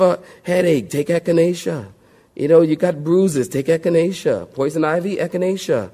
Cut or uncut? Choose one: uncut